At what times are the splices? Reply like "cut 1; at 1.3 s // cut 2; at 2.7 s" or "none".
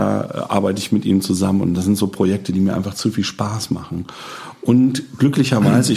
none